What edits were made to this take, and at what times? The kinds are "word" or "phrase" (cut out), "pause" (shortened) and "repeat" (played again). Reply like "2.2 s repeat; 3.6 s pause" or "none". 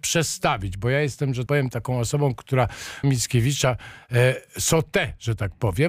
1.5 s word; 3.0 s word